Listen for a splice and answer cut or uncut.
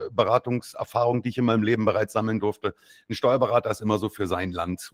uncut